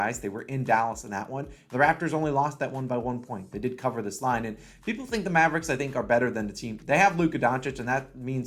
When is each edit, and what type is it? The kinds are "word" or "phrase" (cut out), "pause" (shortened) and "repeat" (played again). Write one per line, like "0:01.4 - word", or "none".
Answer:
none